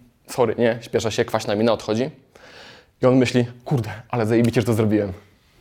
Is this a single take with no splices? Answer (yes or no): yes